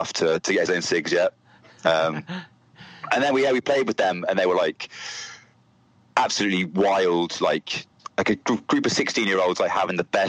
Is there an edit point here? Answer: no; 0 cuts

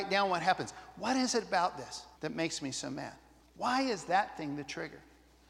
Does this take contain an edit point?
yes; 2 cuts; at 2.1 s, 3.4 s

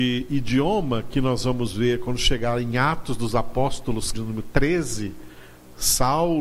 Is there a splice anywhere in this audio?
yes; 1 cut; at 4.1 s

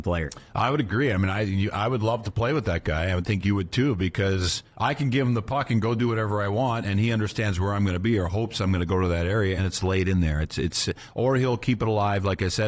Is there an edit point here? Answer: yes; 2 cuts; at 4.7 s, 9.6 s

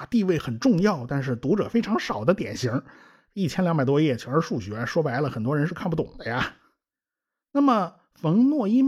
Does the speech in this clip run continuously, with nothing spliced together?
yes; 0 cuts

